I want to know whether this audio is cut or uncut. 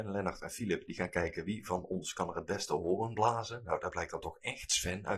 uncut